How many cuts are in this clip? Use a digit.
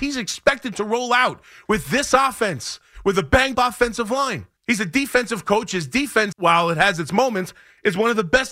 3